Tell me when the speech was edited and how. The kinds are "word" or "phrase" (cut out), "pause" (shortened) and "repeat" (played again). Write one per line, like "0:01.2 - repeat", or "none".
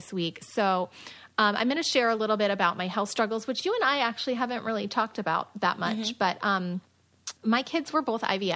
0:07.4 - pause